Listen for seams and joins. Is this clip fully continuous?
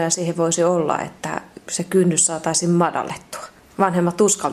no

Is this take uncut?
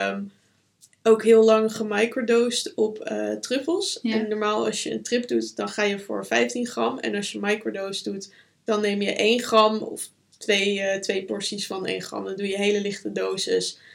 yes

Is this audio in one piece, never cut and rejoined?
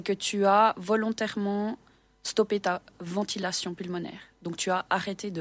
yes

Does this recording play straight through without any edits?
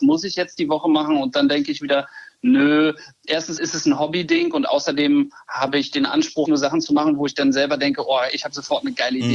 no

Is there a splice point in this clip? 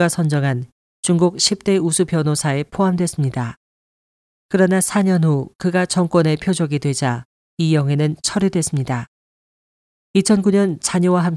no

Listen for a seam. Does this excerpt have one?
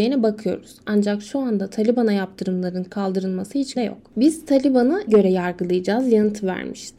yes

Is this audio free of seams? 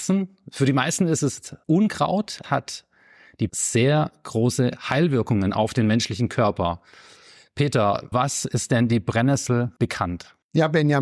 no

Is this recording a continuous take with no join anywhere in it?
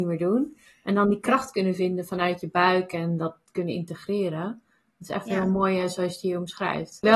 yes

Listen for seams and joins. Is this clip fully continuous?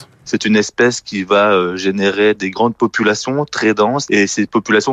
yes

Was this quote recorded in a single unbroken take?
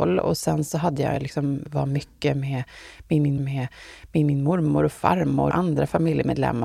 no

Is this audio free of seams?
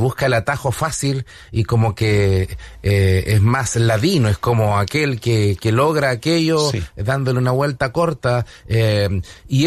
yes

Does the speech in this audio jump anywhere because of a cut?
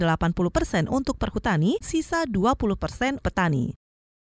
yes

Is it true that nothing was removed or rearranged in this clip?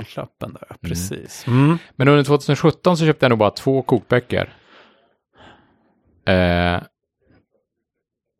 yes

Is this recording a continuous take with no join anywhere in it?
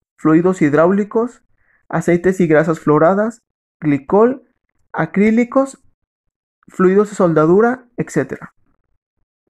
yes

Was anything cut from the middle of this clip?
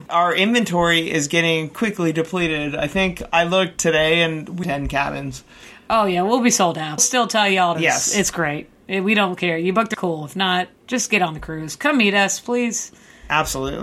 yes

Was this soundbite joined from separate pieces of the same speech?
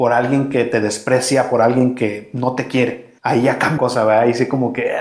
yes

